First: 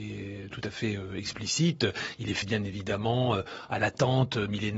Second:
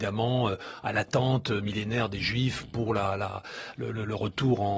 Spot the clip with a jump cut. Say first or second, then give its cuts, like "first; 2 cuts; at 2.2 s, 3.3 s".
first; 1 cut; at 2.4 s